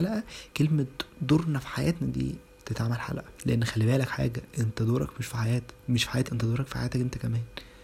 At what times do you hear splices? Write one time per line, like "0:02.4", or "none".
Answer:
0:02.4
0:03.4
0:04.1
0:06.3